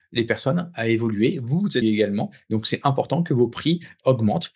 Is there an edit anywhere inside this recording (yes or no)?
yes